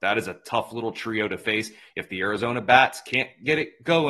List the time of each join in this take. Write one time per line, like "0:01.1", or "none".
none